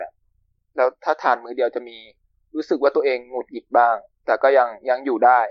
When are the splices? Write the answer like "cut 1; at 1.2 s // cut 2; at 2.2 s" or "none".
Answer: none